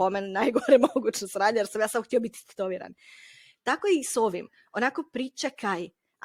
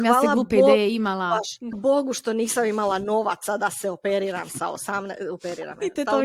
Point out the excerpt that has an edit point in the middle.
second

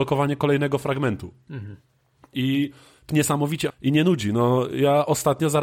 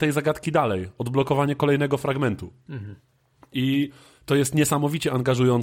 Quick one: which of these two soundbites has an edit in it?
first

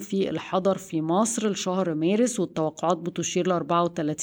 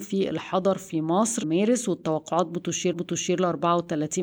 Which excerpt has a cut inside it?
second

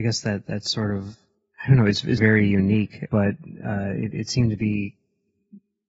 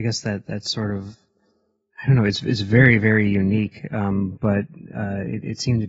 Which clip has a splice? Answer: first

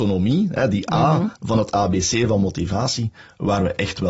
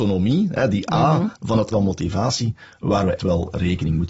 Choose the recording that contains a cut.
second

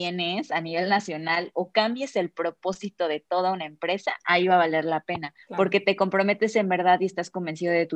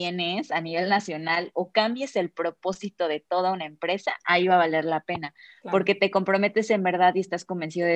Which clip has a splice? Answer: first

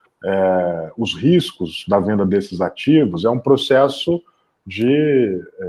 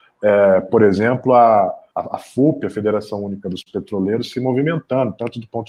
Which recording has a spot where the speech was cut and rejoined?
second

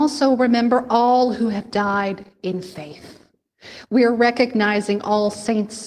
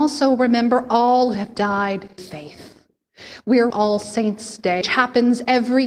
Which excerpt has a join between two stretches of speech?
second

